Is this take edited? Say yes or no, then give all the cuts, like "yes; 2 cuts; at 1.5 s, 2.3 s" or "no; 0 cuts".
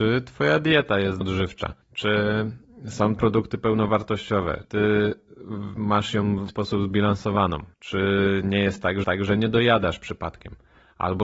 yes; 7 cuts; at 1.2 s, 1.8 s, 3.2 s, 4.6 s, 6.5 s, 7.7 s, 9.0 s